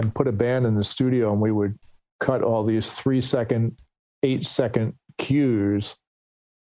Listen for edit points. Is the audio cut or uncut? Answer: uncut